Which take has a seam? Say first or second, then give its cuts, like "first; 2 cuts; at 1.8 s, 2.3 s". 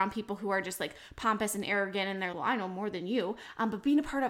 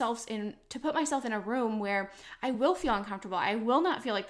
first; 1 cut; at 2.3 s